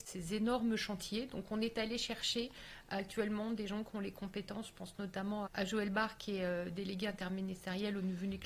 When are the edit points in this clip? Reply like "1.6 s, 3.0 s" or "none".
5.5 s